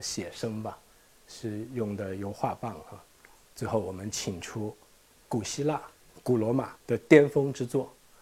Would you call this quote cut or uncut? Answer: cut